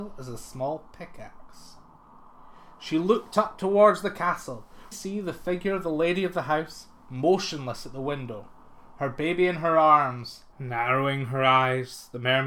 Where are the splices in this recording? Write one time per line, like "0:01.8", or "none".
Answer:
0:04.9
0:07.0
0:10.5